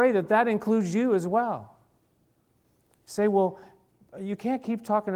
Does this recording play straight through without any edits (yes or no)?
yes